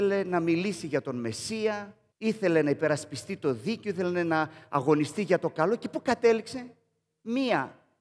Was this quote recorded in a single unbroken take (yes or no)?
no